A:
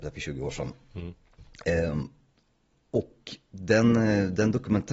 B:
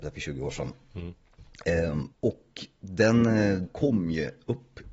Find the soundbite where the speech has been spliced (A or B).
B